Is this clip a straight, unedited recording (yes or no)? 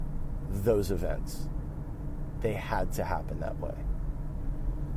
yes